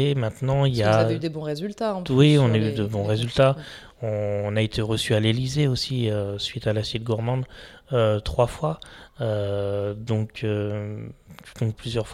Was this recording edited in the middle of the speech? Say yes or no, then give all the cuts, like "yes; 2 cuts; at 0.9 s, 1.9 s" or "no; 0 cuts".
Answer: no; 0 cuts